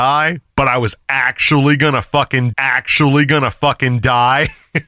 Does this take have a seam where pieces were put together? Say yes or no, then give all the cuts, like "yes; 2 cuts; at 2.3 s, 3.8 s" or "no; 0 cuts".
yes; 1 cut; at 2.5 s